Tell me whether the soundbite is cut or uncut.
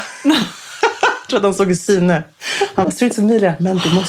cut